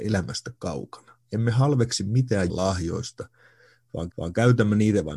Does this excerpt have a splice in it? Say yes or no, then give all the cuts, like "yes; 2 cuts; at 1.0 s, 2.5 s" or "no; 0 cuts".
yes; 2 cuts; at 2.5 s, 4.1 s